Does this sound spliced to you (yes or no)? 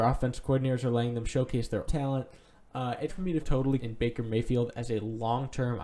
yes